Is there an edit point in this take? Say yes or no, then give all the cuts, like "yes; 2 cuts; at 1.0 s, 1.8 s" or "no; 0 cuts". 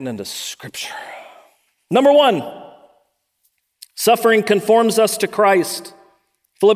no; 0 cuts